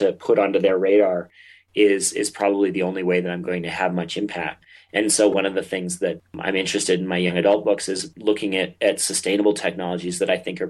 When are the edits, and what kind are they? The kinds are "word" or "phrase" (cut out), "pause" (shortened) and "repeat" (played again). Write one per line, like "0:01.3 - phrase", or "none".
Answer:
none